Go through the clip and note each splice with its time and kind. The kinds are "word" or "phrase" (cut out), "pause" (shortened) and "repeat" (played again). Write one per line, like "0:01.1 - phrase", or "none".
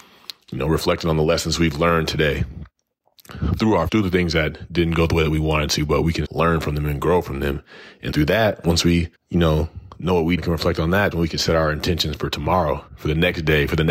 0:03.9 - word
0:06.2 - word
0:08.1 - word
0:09.1 - pause
0:10.4 - phrase
0:11.1 - word
0:12.9 - pause